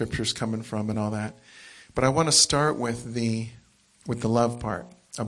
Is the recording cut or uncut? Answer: uncut